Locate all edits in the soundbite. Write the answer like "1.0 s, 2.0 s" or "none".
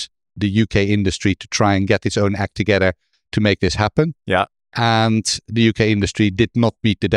none